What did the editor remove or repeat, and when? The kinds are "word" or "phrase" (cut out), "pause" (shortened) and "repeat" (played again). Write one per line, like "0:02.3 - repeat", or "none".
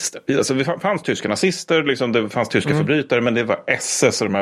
none